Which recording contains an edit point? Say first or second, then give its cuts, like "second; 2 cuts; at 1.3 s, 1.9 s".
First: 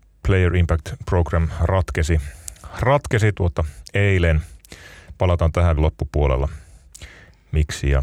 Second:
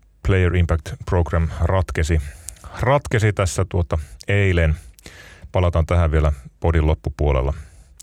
first; 2 cuts; at 3.3 s, 5.8 s